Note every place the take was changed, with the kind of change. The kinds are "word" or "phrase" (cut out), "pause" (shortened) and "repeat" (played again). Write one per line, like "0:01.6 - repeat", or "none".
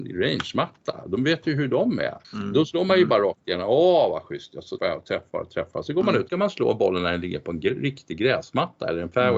0:02.2 - pause
0:04.8 - word
0:06.3 - phrase